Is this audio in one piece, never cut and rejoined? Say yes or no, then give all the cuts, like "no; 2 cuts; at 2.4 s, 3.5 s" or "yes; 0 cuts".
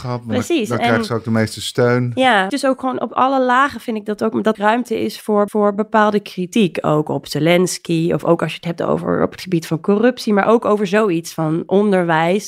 no; 3 cuts; at 2.5 s, 4.5 s, 5.5 s